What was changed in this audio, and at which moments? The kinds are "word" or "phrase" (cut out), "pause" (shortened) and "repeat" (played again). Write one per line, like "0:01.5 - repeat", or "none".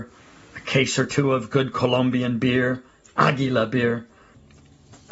none